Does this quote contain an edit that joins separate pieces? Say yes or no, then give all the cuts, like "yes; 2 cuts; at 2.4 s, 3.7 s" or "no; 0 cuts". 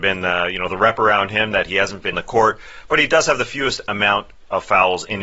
yes; 1 cut; at 2.1 s